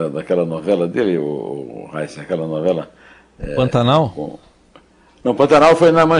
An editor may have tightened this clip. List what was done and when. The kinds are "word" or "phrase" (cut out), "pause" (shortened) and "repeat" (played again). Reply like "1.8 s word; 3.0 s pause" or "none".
none